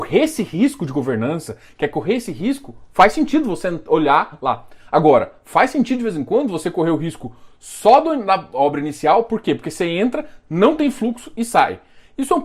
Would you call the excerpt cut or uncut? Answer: uncut